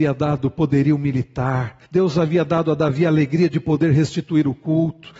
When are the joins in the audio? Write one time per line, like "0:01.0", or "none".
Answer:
0:01.8